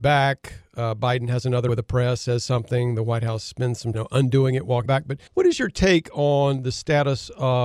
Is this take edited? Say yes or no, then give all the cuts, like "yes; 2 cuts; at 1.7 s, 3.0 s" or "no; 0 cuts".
yes; 4 cuts; at 1.7 s, 3.9 s, 4.9 s, 5.3 s